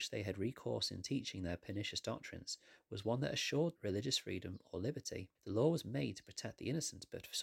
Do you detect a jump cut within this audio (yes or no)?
yes